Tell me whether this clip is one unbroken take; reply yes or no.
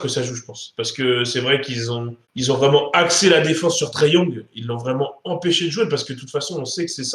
no